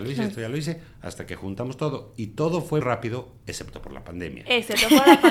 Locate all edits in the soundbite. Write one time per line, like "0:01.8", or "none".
0:02.8